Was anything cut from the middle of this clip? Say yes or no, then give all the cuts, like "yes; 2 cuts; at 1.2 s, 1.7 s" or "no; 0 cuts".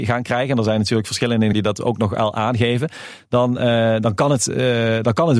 yes; 1 cut; at 1.5 s